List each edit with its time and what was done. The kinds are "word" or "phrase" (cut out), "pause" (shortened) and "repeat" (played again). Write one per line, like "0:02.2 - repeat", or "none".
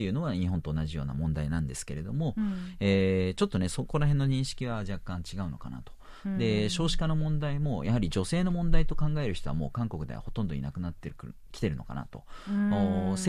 none